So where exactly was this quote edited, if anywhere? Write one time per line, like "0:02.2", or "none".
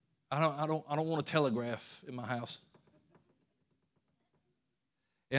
none